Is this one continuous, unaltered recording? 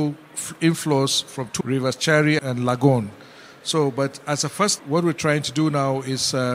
no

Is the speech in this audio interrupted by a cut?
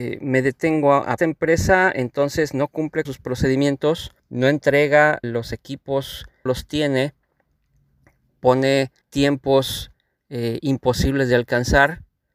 yes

